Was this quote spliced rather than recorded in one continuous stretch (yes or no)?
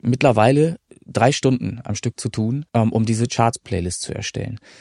yes